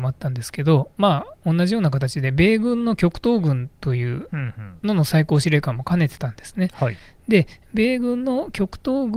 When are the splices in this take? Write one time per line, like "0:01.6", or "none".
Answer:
none